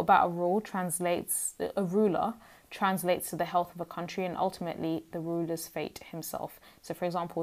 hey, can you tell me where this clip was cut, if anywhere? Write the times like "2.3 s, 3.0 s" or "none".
none